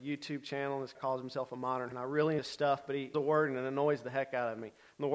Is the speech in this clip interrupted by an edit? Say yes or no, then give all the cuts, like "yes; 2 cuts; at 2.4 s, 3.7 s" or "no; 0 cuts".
yes; 4 cuts; at 0.9 s, 1.9 s, 2.4 s, 3.1 s